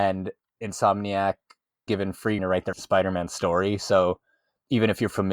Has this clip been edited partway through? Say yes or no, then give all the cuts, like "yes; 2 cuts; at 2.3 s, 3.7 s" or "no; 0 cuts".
yes; 3 cuts; at 1.9 s, 2.4 s, 2.7 s